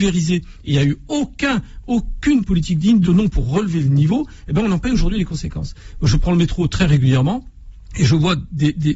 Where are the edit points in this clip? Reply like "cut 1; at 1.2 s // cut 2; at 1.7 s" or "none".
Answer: cut 1; at 2.4 s // cut 2; at 3.0 s

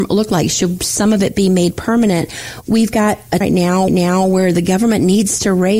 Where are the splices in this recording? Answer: cut 1; at 3.4 s // cut 2; at 3.9 s

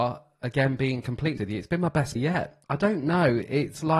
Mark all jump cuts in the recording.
cut 1; at 1.4 s // cut 2; at 2.2 s // cut 3; at 2.6 s

